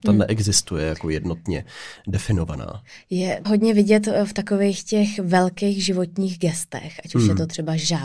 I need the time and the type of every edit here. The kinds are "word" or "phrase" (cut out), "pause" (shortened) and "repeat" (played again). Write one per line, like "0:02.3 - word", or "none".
0:03.4 - word